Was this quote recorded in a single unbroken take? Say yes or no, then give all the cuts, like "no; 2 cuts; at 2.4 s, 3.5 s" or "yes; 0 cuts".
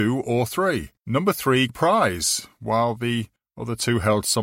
no; 3 cuts; at 1.0 s, 1.7 s, 3.4 s